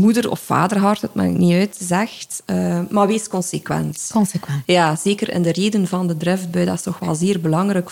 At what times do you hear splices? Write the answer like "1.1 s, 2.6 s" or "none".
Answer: none